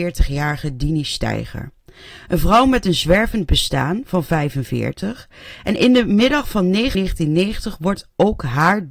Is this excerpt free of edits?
no; 1 cut; at 6.9 s

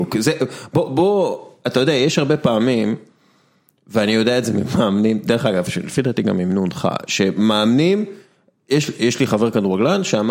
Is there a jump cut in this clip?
no; 0 cuts

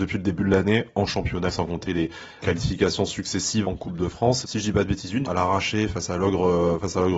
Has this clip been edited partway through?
yes; 5 cuts; at 1.5 s, 2.4 s, 3.6 s, 4.4 s, 5.2 s

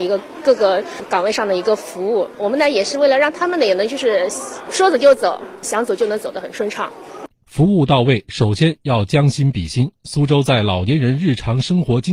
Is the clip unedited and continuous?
no; 1 cut; at 5.6 s

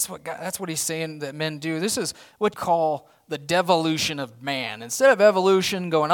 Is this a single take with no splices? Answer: no; 1 cut; at 2.5 s

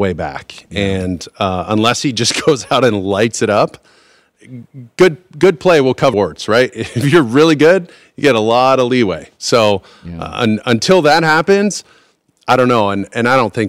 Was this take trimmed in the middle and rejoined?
yes; 1 cut; at 6.1 s

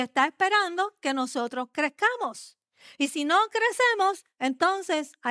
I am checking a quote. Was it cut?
no; 0 cuts

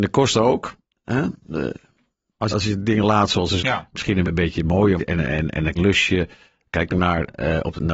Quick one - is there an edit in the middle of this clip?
yes; 6 cuts; at 2.5 s, 3.6 s, 4.2 s, 5.0 s, 5.8 s, 6.9 s

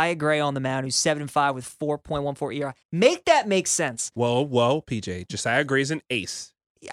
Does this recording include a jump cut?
yes; 1 cut; at 2.8 s

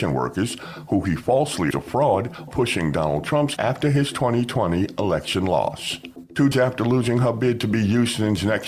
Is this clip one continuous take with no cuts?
no; 4 cuts; at 1.7 s, 2.5 s, 3.6 s, 6.5 s

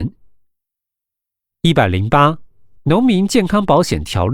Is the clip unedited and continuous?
no; 1 cut; at 2.8 s

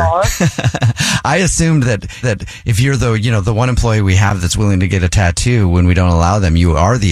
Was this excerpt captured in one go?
no; 1 cut; at 2.2 s

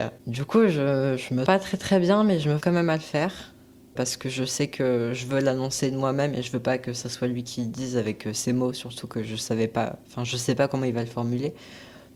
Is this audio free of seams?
no; 2 cuts; at 1.5 s, 2.6 s

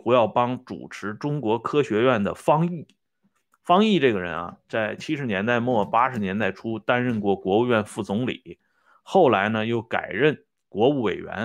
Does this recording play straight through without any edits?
yes; 0 cuts

